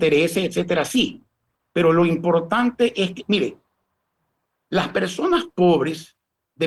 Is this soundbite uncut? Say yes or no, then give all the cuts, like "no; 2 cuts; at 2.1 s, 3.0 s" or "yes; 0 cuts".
yes; 0 cuts